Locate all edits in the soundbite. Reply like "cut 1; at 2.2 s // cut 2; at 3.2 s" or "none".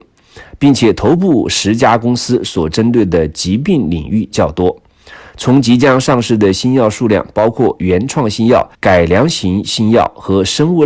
cut 1; at 8.7 s